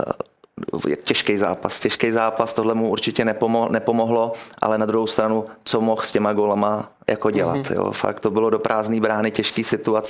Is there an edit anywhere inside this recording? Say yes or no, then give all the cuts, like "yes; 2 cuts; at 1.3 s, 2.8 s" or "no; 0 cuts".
no; 0 cuts